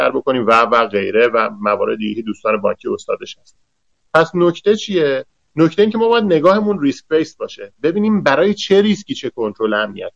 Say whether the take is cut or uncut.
uncut